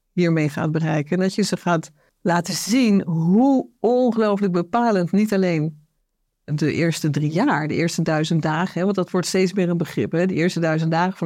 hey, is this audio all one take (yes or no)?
no